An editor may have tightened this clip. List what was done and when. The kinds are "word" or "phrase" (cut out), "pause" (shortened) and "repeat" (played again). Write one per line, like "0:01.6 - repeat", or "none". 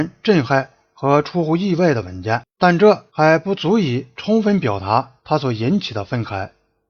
0:03.1 - pause
0:05.2 - pause

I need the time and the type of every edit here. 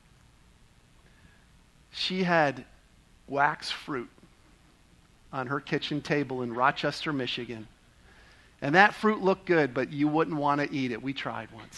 none

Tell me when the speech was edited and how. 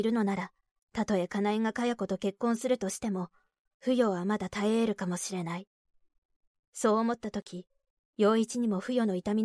none

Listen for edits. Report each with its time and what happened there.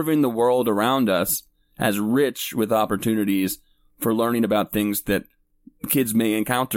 none

